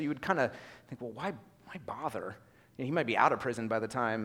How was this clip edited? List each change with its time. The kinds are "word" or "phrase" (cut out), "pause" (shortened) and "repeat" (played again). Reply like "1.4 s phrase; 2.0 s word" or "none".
none